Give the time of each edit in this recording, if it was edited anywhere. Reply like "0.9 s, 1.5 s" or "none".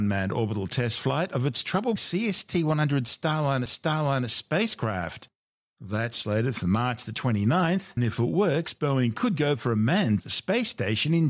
2.0 s, 3.7 s, 8.0 s, 10.2 s